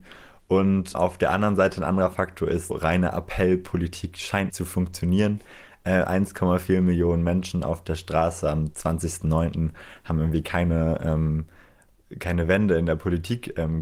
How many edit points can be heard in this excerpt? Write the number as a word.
three